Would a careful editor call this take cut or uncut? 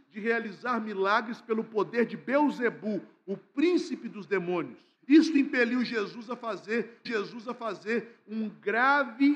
cut